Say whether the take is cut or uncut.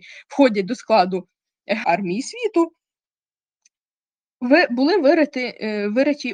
cut